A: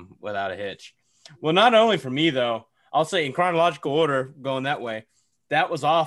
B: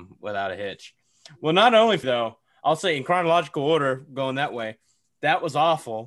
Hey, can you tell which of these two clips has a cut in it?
B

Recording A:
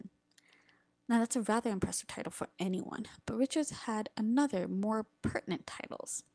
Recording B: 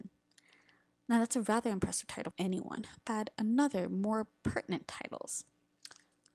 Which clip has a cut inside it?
B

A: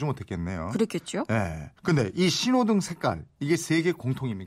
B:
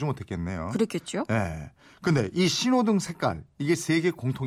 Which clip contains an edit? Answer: A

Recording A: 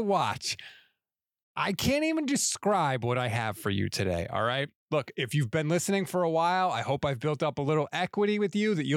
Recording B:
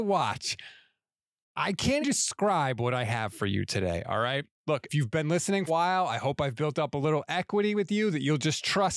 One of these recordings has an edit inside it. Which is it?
B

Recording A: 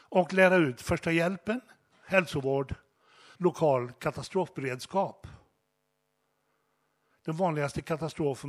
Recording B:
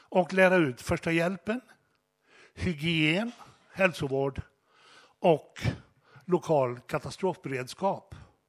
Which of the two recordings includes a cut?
A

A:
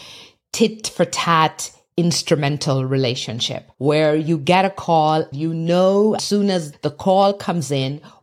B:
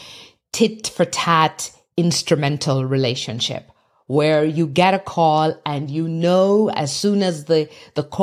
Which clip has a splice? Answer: A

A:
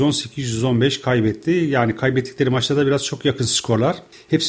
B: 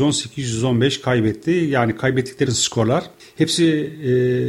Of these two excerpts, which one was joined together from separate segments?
B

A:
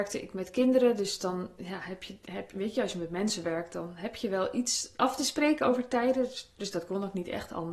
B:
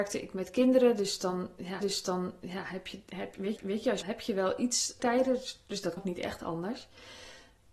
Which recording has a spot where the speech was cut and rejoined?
B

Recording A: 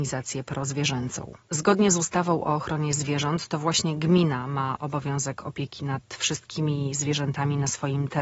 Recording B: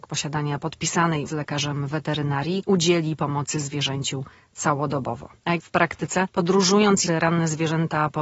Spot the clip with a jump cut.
B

